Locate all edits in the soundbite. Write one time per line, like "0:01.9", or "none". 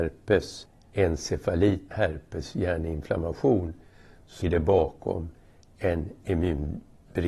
0:01.9
0:04.4